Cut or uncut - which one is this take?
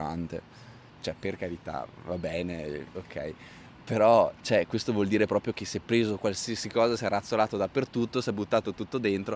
uncut